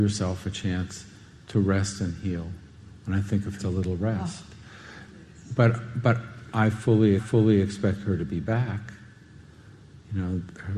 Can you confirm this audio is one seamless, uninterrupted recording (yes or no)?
no